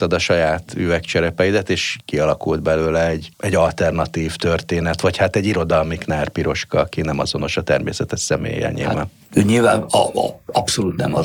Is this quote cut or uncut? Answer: uncut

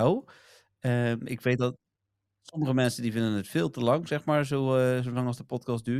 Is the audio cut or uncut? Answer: uncut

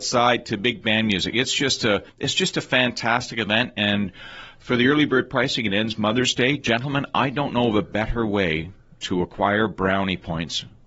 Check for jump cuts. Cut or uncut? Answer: cut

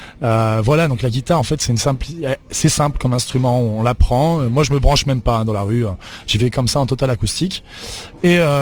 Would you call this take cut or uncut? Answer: uncut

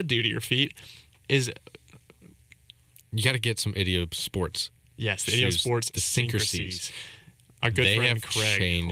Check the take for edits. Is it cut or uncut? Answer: uncut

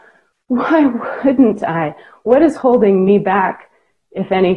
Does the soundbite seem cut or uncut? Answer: uncut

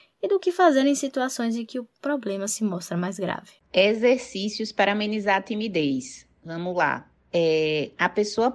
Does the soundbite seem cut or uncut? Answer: cut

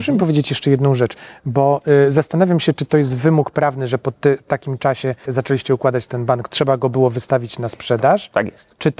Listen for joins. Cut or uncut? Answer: cut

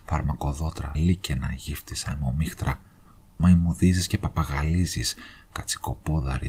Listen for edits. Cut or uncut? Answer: cut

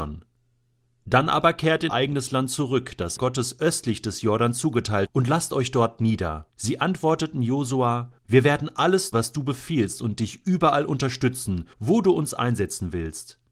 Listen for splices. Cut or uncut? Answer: cut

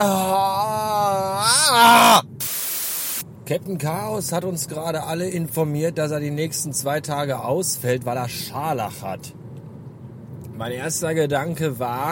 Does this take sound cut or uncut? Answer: uncut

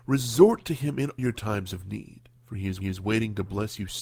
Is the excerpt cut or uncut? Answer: cut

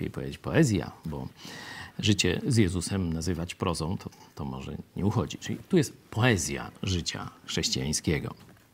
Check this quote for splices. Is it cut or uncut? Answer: uncut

